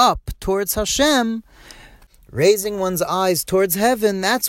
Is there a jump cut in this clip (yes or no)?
no